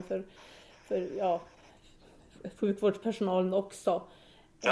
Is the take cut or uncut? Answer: uncut